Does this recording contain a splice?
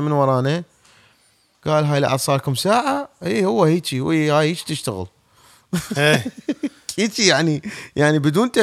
no; 0 cuts

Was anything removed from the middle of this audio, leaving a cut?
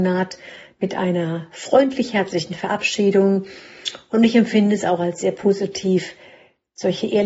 no; 0 cuts

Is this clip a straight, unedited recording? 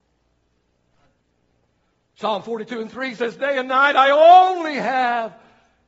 yes; 0 cuts

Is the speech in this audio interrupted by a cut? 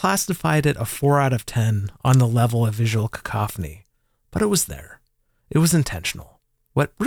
no; 0 cuts

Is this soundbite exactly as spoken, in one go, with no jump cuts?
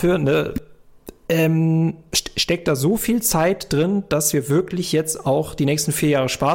yes; 0 cuts

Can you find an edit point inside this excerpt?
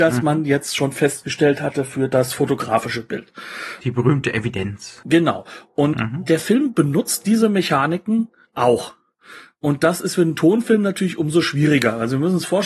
no; 0 cuts

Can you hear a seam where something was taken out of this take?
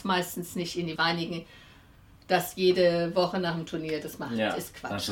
yes; 1 cut; at 1.0 s

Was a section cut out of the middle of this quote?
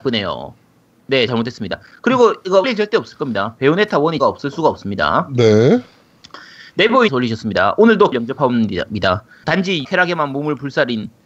yes; 7 cuts; at 1.3 s, 2.6 s, 4.2 s, 7.1 s, 8.1 s, 9.4 s, 9.8 s

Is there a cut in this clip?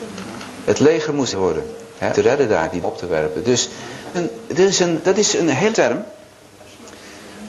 yes; 6 cuts; at 1.3 s, 2.1 s, 2.8 s, 4.1 s, 5.0 s, 5.7 s

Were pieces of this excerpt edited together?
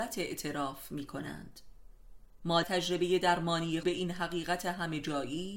yes; 2 cuts; at 2.6 s, 3.8 s

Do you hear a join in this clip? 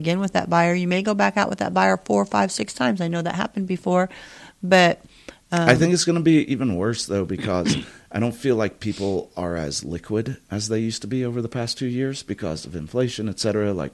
no; 0 cuts

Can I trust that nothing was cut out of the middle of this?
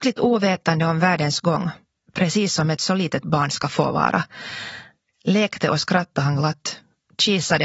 yes; 0 cuts

